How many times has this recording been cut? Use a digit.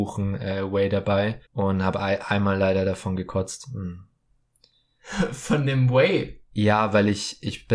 1